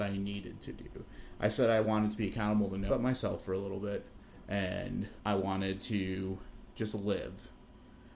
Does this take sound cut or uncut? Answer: cut